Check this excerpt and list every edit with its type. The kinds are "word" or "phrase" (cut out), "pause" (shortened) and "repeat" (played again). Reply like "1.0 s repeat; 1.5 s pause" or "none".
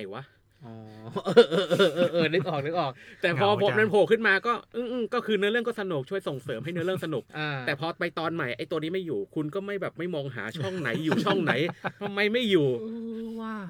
7.3 s pause